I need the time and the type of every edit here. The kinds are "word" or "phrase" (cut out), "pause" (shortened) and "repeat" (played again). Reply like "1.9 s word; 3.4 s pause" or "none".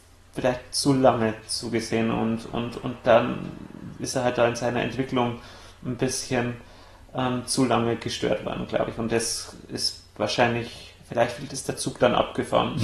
none